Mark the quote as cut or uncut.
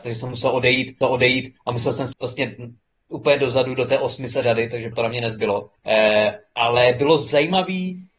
cut